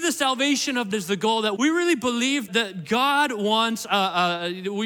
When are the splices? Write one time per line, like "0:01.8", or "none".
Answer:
0:00.9
0:01.6
0:02.5

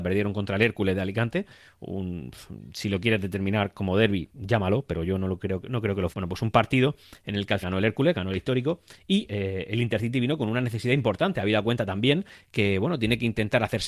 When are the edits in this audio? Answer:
0:06.1
0:07.6
0:09.3

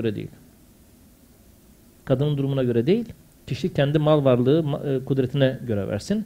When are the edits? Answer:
none

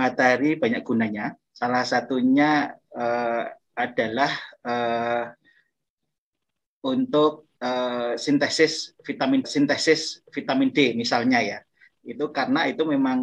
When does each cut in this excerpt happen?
0:01.5
0:07.6
0:09.4

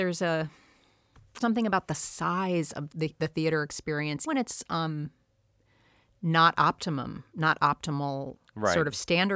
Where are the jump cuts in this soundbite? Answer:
0:01.4
0:02.9
0:04.3

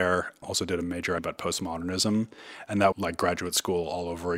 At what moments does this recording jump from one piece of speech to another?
0:01.2
0:02.9

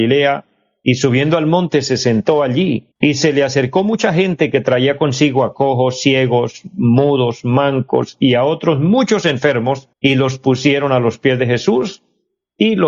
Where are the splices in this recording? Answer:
0:02.9
0:09.9

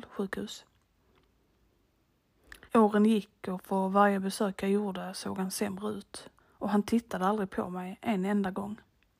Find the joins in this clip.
0:02.7
0:06.4

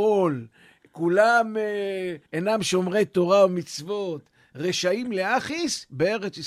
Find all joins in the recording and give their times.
0:02.2

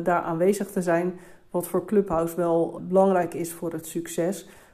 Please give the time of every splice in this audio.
0:02.8

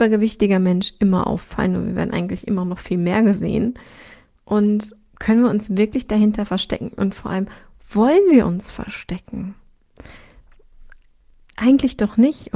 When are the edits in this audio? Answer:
none

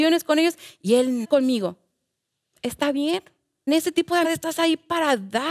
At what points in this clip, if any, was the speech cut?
0:01.2
0:03.7
0:04.2

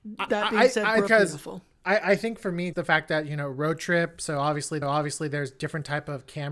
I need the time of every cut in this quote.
0:01.1
0:02.7
0:04.8

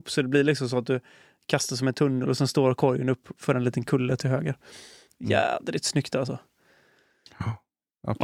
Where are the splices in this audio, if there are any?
none

